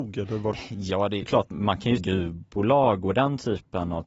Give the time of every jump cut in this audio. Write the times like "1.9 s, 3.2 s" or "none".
1.2 s, 2.0 s